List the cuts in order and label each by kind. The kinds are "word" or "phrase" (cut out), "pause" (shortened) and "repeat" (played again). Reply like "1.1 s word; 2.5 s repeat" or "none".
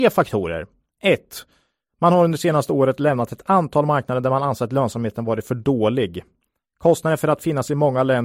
none